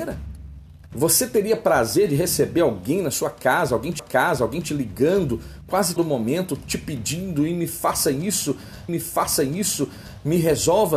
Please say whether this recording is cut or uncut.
cut